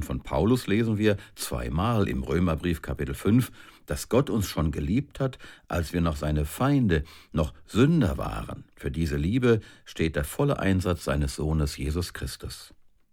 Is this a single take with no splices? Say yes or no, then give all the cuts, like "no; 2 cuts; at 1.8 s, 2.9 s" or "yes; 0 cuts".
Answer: no; 2 cuts; at 3.8 s, 8.7 s